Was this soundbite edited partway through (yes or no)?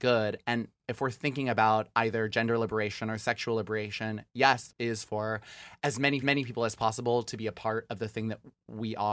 yes